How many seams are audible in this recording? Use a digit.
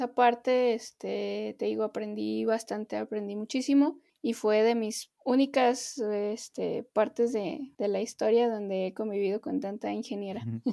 3